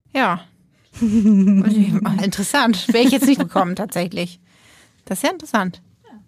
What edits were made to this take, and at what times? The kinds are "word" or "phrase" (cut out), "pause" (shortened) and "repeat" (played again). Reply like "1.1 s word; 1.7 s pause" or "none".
2.2 s word; 3.4 s word